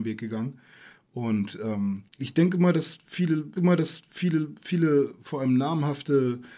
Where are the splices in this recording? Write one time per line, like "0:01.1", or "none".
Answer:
0:02.1
0:03.6